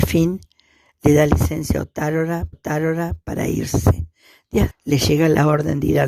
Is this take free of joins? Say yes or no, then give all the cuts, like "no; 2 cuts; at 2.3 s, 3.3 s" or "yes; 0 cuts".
no; 2 cuts; at 2.5 s, 4.7 s